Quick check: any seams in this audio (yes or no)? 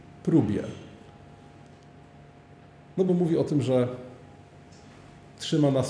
no